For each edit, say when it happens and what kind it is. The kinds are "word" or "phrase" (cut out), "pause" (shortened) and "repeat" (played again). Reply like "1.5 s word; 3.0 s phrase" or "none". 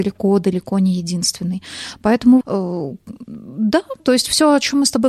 2.4 s phrase; 4.0 s word